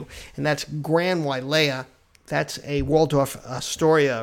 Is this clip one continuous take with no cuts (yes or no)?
yes